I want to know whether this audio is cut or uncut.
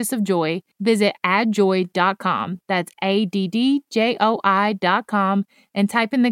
uncut